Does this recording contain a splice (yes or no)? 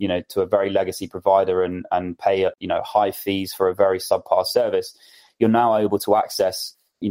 no